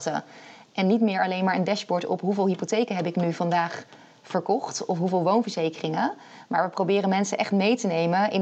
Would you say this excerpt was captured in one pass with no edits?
yes; 0 cuts

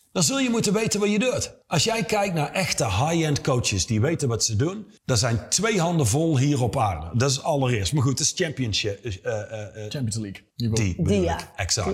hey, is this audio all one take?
no; 3 cuts; at 1.6 s, 5.0 s, 10.5 s

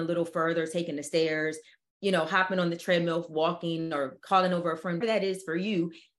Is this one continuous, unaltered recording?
no; 1 cut; at 5.0 s

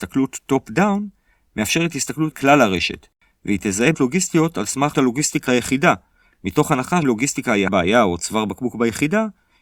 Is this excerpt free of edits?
no; 6 cuts; at 2.3 s, 3.9 s, 4.9 s, 5.5 s, 7.0 s, 7.7 s

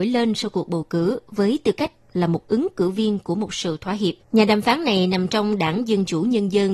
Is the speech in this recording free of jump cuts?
no; 1 cut; at 4.2 s

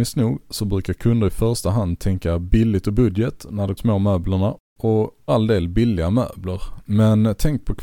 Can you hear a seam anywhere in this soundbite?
yes; 2 cuts; at 3.8 s, 5.3 s

